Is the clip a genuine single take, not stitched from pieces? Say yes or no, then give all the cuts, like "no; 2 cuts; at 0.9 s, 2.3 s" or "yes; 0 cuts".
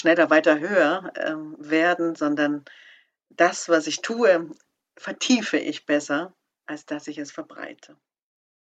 yes; 0 cuts